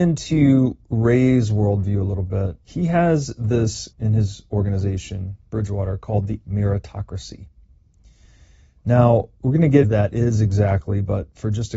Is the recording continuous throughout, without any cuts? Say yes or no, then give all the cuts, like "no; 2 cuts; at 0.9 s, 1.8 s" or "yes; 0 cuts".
no; 5 cuts; at 2.6 s, 3.9 s, 6.4 s, 9.4 s, 9.8 s